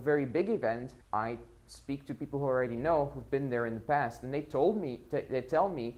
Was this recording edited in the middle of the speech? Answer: yes; 1 cut; at 1.0 s

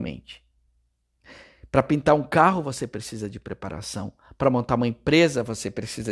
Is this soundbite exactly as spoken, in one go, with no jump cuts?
yes; 0 cuts

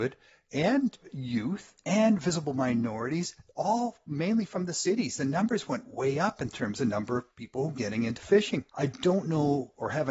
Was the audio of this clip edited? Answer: yes; 1 cut; at 8.7 s

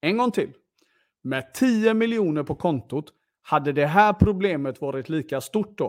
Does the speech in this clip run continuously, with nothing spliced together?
yes; 0 cuts

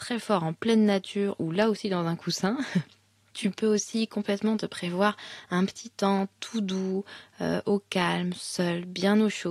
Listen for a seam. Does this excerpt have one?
no; 0 cuts

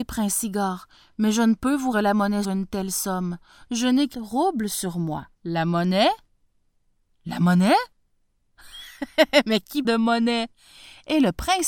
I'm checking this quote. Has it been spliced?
yes; 5 cuts; at 1.9 s, 2.4 s, 4.1 s, 5.4 s, 9.8 s

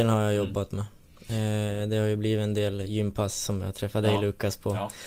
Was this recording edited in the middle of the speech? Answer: no; 0 cuts

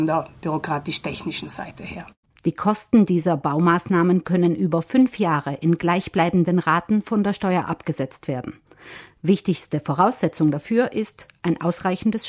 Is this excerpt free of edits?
yes; 0 cuts

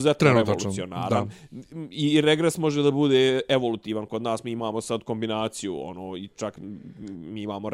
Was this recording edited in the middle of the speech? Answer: no; 0 cuts

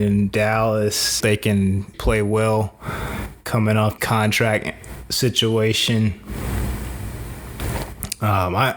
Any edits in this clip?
yes; 3 cuts; at 1.2 s, 1.9 s, 4.0 s

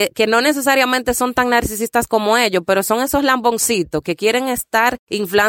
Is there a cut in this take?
no; 0 cuts

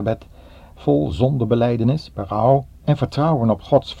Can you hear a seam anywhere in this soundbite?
no; 0 cuts

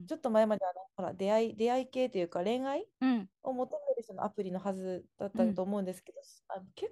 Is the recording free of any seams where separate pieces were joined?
no; 1 cut; at 2.9 s

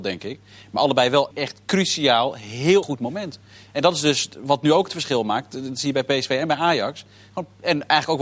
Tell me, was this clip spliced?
yes; 2 cuts; at 1.3 s, 2.8 s

